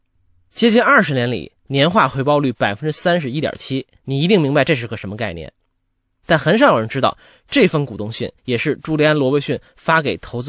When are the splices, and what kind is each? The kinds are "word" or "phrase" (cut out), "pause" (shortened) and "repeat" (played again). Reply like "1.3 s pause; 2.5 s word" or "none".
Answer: 4.0 s pause; 8.4 s pause